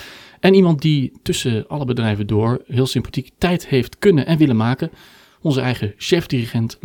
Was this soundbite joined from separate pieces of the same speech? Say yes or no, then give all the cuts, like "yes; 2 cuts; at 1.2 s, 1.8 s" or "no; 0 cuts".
no; 0 cuts